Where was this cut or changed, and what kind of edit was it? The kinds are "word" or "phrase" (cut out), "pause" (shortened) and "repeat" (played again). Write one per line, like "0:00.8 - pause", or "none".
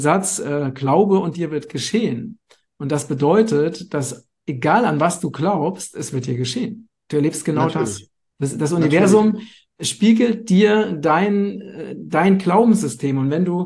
none

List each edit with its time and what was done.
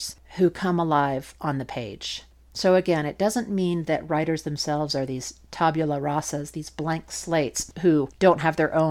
none

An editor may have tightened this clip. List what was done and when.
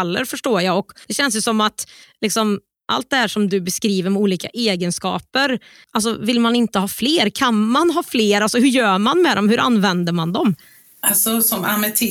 none

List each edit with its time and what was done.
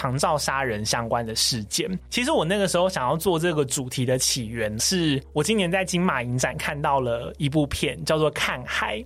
0:04.8 - word

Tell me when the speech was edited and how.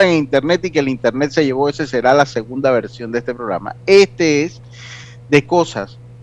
none

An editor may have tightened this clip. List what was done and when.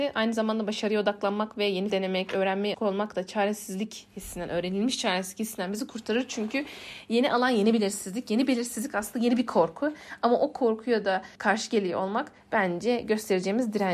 0:01.9 - word
0:02.7 - word
0:11.4 - pause

